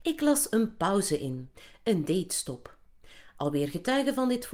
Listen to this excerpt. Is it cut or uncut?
uncut